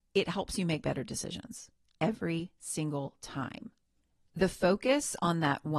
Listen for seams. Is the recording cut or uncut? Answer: uncut